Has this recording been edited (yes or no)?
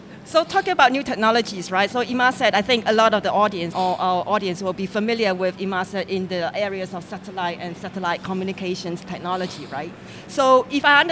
yes